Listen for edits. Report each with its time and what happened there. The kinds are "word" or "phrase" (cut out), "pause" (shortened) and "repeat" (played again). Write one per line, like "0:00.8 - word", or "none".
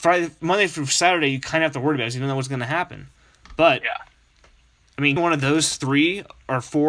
0:05.2 - word